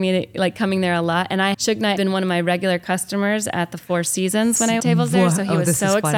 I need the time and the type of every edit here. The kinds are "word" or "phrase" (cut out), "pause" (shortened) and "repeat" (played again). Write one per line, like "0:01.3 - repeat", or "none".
0:01.5 - word
0:02.0 - word
0:04.8 - word